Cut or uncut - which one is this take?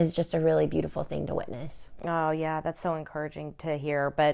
uncut